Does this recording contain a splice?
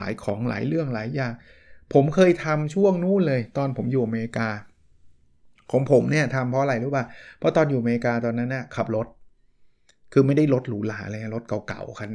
no; 0 cuts

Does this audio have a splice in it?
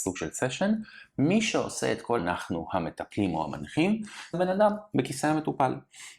yes; 2 cuts; at 2.2 s, 4.3 s

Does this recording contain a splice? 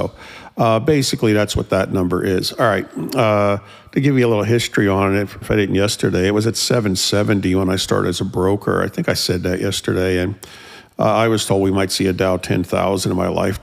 yes; 1 cut; at 5.4 s

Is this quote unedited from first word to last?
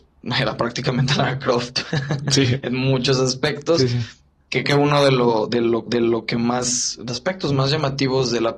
no; 3 cuts; at 4.6 s, 5.9 s, 7.1 s

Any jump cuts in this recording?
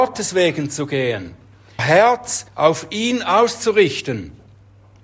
yes; 2 cuts; at 1.8 s, 2.5 s

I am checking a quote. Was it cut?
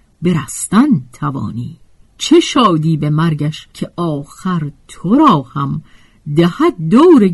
yes; 2 cuts; at 2.0 s, 3.7 s

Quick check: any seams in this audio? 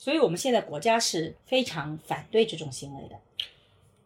yes; 1 cut; at 1.4 s

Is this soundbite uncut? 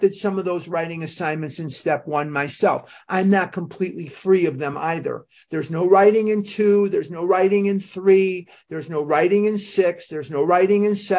yes; 0 cuts

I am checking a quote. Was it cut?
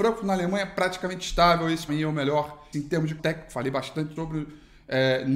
yes; 4 cuts; at 1.9 s, 2.7 s, 3.2 s, 4.2 s

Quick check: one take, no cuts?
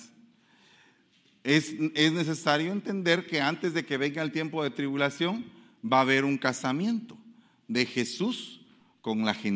yes; 0 cuts

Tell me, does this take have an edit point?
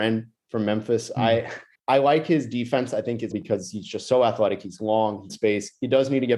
yes; 3 cuts; at 1.7 s, 3.3 s, 5.3 s

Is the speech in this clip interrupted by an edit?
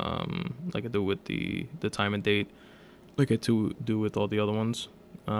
no; 0 cuts

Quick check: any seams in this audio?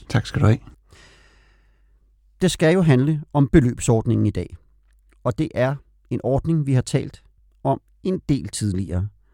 no; 0 cuts

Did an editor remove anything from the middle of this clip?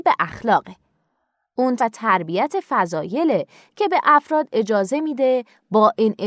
yes; 1 cut; at 1.8 s

